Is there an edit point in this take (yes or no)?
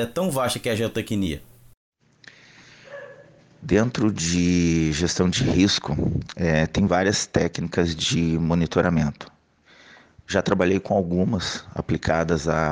no